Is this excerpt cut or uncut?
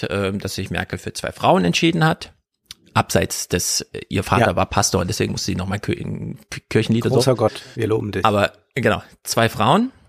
uncut